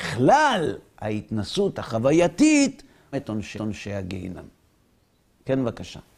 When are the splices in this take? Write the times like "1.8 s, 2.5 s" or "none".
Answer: 3.1 s, 3.6 s